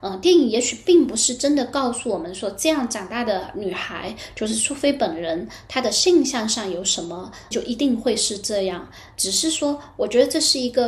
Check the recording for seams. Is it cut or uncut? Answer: cut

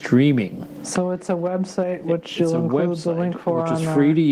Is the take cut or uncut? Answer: uncut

